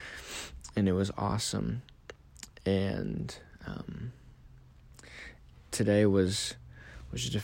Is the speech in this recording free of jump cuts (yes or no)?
yes